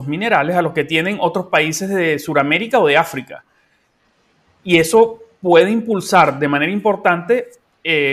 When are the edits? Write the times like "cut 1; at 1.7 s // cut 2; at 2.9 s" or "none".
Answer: none